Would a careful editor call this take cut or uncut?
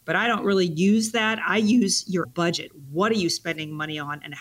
cut